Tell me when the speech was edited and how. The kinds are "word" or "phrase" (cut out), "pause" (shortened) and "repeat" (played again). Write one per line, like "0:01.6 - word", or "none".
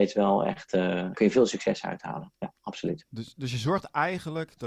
0:01.1 - word